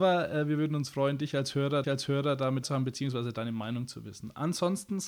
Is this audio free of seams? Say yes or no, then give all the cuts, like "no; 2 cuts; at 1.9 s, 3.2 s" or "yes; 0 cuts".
no; 2 cuts; at 1.8 s, 2.6 s